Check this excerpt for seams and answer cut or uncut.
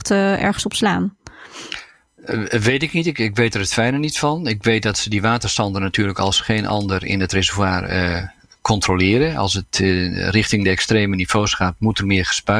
uncut